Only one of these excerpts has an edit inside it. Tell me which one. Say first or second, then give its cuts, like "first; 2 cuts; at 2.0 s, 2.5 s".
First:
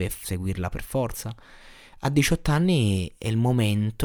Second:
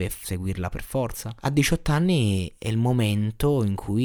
second; 1 cut; at 1.4 s